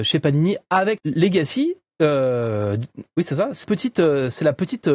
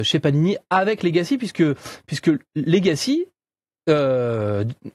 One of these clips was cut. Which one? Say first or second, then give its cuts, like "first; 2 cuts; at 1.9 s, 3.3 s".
first; 3 cuts; at 1.0 s, 1.9 s, 3.6 s